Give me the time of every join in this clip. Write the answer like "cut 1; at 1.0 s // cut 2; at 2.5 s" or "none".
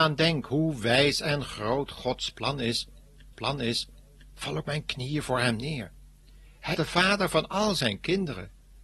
cut 1; at 3.3 s // cut 2; at 4.6 s // cut 3; at 6.7 s